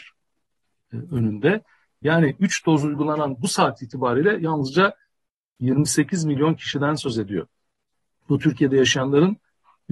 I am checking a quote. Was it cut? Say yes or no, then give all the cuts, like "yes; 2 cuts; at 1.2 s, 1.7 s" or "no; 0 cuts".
no; 0 cuts